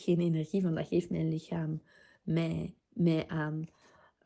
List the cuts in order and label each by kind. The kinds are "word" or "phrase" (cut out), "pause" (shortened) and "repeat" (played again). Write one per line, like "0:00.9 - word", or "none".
0:02.8 - pause